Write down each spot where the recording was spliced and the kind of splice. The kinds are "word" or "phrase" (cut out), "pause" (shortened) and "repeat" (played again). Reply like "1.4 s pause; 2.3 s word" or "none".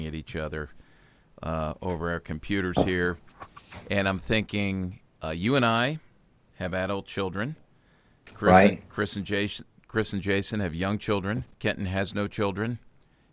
11.5 s pause